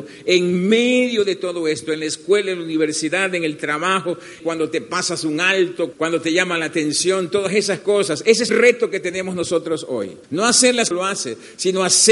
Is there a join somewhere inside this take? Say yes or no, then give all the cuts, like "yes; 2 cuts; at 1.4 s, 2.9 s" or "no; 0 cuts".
yes; 5 cuts; at 4.4 s, 5.9 s, 8.5 s, 10.2 s, 10.9 s